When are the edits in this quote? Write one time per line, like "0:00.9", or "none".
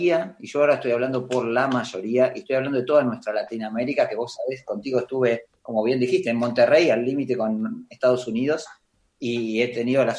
0:05.6